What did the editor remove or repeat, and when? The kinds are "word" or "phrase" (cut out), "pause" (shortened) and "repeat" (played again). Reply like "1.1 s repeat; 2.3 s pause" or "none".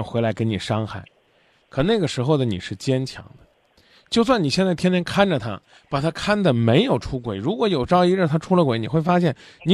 none